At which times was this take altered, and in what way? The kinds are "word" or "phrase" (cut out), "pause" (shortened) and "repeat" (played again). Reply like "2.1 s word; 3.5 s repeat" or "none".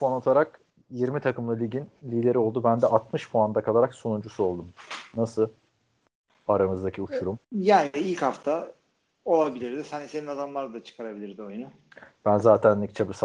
7.4 s pause